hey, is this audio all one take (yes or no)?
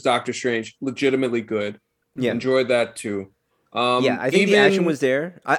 yes